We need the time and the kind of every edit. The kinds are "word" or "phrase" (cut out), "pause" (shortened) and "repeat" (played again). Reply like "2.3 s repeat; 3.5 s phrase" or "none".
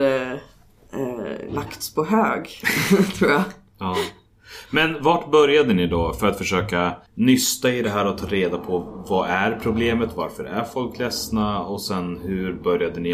7.1 s pause